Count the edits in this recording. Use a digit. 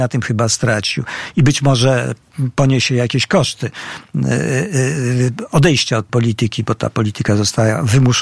1